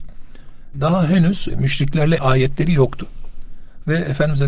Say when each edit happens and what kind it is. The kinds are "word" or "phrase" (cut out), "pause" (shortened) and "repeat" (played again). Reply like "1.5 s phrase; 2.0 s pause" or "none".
2.2 s word